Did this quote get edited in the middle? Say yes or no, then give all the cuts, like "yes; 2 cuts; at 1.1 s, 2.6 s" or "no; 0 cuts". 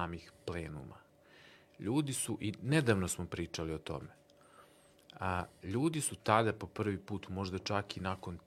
no; 0 cuts